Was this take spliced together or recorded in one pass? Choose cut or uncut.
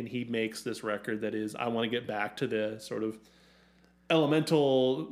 uncut